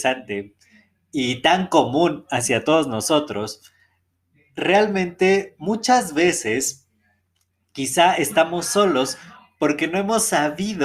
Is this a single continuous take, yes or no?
yes